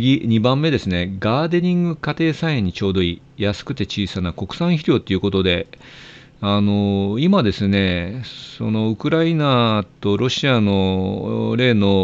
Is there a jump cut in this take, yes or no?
no